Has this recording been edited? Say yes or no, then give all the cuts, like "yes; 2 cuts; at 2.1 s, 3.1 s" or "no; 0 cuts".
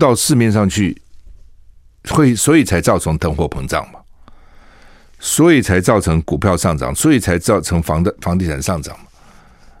no; 0 cuts